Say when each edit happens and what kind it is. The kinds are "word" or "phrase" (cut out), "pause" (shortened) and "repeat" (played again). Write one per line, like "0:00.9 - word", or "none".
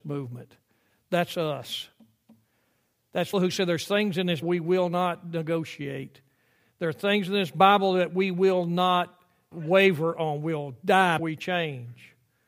0:03.3 - word
0:04.4 - word
0:09.5 - word
0:11.2 - word